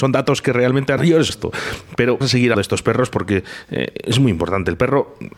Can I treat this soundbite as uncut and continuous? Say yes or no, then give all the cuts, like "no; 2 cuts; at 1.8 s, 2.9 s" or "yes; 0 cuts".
no; 4 cuts; at 1.0 s, 1.3 s, 2.2 s, 2.5 s